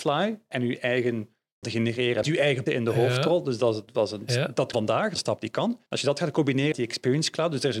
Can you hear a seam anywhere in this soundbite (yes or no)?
yes